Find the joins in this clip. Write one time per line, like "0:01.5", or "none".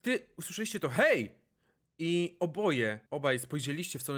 0:03.1